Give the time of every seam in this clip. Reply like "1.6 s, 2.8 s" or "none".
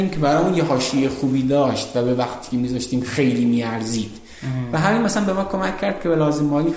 none